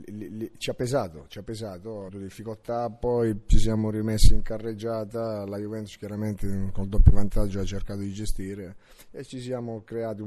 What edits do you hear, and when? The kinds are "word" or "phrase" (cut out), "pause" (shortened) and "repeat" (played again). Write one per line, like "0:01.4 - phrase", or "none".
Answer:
0:02.1 - phrase